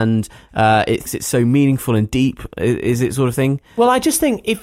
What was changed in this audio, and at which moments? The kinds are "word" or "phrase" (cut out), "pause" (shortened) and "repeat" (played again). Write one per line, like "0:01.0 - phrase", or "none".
0:01.0 - word